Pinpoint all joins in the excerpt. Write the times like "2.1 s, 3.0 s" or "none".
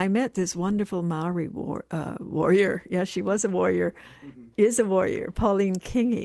none